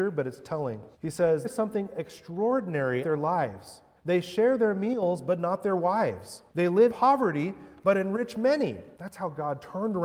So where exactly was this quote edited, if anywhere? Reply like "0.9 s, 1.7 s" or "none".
0.9 s, 1.4 s, 3.0 s, 4.0 s, 6.5 s, 6.9 s, 8.9 s